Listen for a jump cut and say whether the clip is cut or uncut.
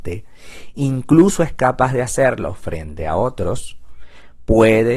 uncut